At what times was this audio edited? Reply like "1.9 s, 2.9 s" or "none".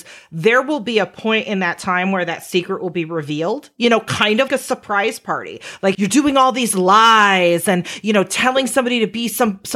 4.5 s, 5.9 s

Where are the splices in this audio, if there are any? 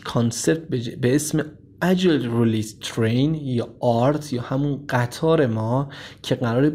none

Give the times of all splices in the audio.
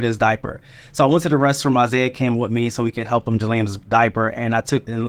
3.4 s

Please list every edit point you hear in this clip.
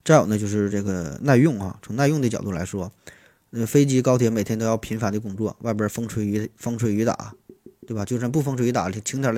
none

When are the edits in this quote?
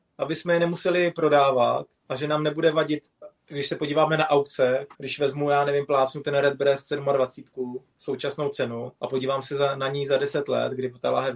2.0 s, 4.9 s, 9.0 s

